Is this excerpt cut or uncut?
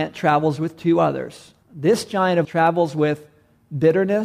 cut